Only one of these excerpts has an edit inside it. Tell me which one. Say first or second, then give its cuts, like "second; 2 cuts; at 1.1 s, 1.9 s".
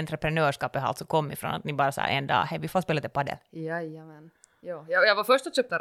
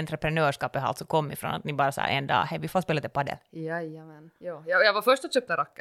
second; 1 cut; at 4.4 s